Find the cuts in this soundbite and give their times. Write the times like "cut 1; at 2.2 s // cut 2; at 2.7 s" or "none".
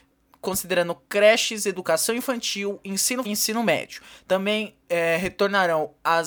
cut 1; at 3.2 s